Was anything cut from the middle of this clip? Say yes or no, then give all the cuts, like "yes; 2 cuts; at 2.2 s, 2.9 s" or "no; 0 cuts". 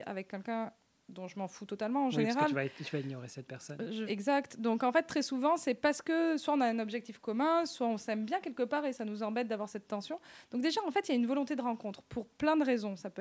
yes; 1 cut; at 4.1 s